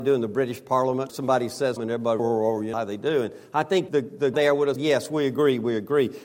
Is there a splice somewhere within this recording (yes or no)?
yes